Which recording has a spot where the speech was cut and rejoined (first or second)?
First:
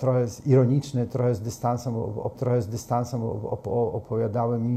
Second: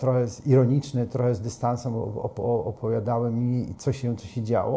first